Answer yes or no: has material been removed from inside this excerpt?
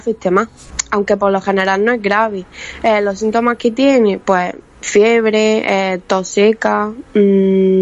no